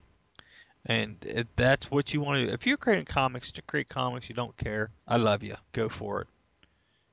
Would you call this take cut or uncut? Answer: cut